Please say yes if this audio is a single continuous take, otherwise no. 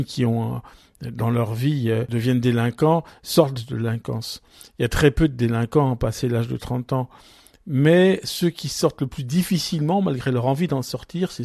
yes